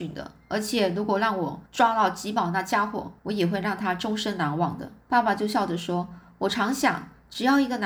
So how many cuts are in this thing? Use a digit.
3